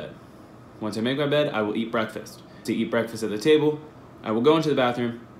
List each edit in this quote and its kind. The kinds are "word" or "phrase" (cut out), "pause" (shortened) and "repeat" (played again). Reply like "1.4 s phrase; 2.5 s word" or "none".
2.6 s word